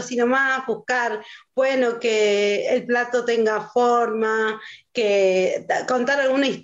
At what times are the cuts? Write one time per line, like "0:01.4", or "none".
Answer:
none